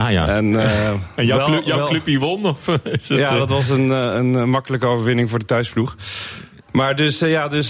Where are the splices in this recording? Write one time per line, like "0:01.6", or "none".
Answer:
none